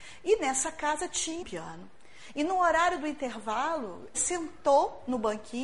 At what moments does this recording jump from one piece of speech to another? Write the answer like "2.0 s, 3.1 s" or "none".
1.4 s, 4.1 s